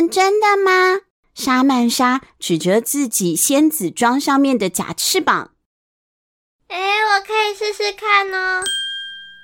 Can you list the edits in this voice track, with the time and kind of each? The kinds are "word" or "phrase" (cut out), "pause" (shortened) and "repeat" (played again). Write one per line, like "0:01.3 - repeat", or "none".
0:01.2 - pause